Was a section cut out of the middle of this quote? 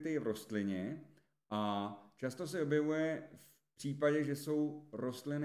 no; 0 cuts

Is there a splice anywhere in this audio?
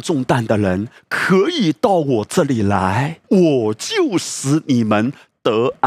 yes; 1 cut; at 3.2 s

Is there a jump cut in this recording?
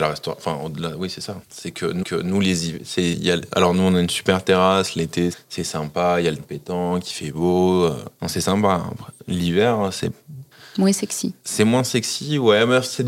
yes; 8 cuts; at 1.4 s, 2.0 s, 3.1 s, 5.3 s, 6.4 s, 8.2 s, 10.5 s, 11.4 s

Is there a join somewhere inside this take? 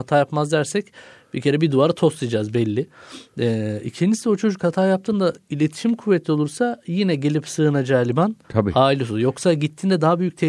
yes; 1 cut; at 8.4 s

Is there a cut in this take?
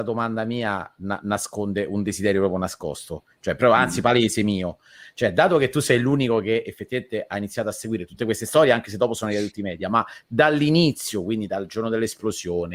no; 0 cuts

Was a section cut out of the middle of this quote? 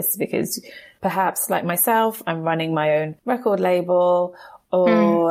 no; 0 cuts

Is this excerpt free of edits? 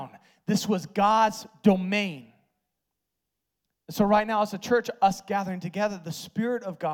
yes; 0 cuts

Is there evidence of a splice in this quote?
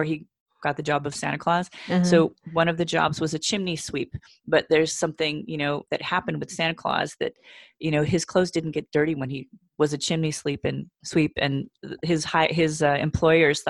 no; 0 cuts

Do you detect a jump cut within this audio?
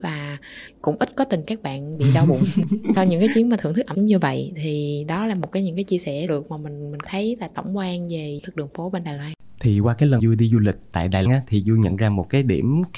yes; 7 cuts; at 1.4 s, 3.9 s, 6.3 s, 7.0 s, 8.4 s, 10.2 s, 11.2 s

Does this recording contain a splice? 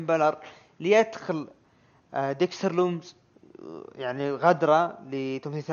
no; 0 cuts

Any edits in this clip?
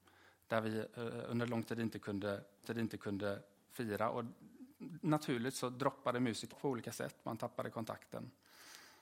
yes; 3 cuts; at 0.9 s, 2.6 s, 6.5 s

